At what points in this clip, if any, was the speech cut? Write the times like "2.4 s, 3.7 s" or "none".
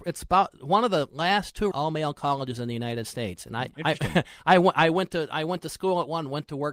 1.7 s, 3.7 s